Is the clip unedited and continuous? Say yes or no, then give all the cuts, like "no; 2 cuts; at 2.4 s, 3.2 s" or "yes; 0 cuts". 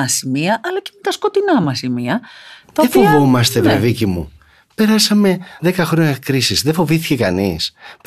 yes; 0 cuts